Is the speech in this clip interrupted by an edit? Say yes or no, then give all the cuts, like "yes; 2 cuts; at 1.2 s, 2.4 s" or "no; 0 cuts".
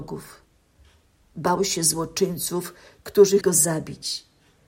yes; 1 cut; at 3.4 s